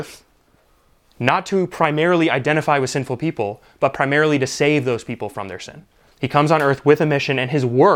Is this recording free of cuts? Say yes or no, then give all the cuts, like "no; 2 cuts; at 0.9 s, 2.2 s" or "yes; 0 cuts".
yes; 0 cuts